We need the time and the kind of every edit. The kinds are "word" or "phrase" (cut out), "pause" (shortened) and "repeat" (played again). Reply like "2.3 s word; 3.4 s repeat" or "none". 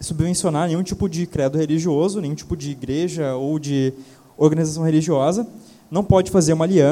none